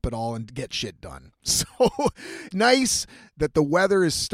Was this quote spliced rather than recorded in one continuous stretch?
yes; 1 cut; at 2.5 s

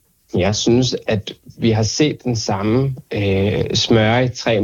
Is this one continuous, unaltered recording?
yes; 0 cuts

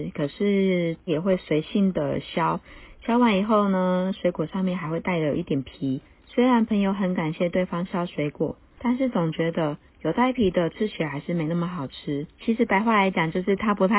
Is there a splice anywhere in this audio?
yes; 2 cuts; at 6.1 s, 12.3 s

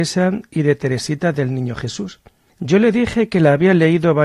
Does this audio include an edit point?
no; 0 cuts

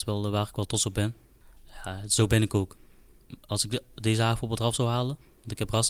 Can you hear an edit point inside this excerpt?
no; 0 cuts

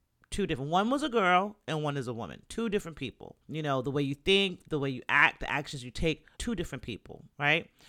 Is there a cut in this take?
yes; 2 cuts; at 3.4 s, 6.4 s

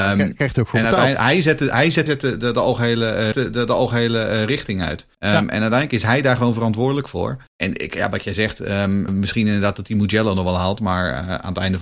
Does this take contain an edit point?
yes; 5 cuts; at 2.1 s, 3.3 s, 5.1 s, 7.5 s, 9.1 s

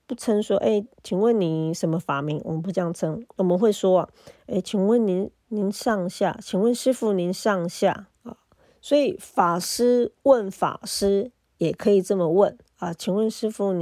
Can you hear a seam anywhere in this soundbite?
yes; 3 cuts; at 0.9 s, 5.4 s, 8.1 s

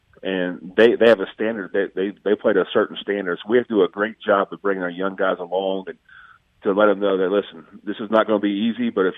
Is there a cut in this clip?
no; 0 cuts

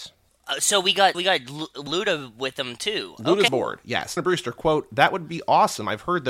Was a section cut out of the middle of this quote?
yes; 4 cuts; at 1.1 s, 1.9 s, 3.5 s, 4.2 s

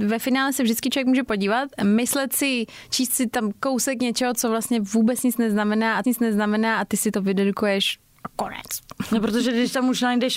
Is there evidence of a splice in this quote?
yes; 1 cut; at 6.0 s

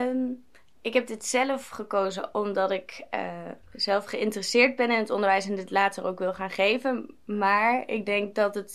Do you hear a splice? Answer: no; 0 cuts

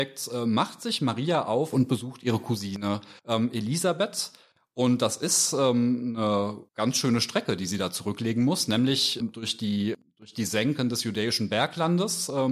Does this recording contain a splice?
yes; 3 cuts; at 3.2 s, 6.7 s, 9.2 s

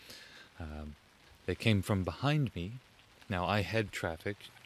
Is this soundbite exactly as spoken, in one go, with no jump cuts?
yes; 0 cuts

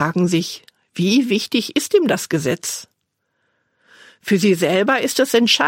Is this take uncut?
yes; 0 cuts

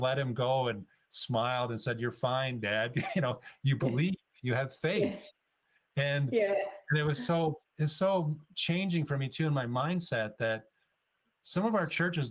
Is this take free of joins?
yes; 0 cuts

